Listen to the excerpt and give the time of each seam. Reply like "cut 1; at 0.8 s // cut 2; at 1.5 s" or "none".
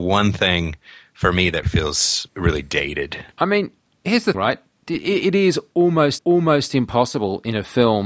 cut 1; at 1.6 s // cut 2; at 2.3 s // cut 3; at 3.3 s // cut 4; at 4.3 s // cut 5; at 6.2 s

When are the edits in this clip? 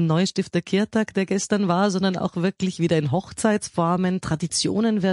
none

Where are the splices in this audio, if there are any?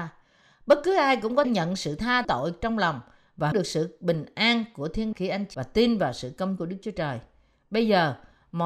cut 1; at 1.4 s // cut 2; at 2.2 s // cut 3; at 3.5 s // cut 4; at 5.1 s // cut 5; at 5.5 s // cut 6; at 6.6 s

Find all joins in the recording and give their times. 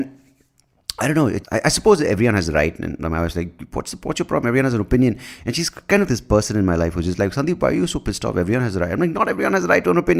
cut 1; at 1.4 s // cut 2; at 6.1 s

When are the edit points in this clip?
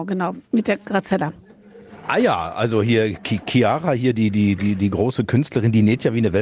none

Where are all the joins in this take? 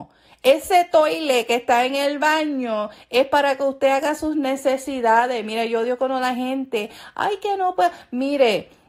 none

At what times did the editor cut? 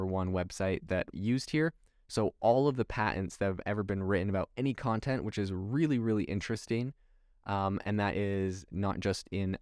cut 1; at 1.1 s

